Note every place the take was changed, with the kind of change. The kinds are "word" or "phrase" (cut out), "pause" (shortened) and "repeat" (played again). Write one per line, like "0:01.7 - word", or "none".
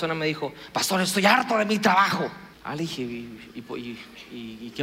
0:02.5 - pause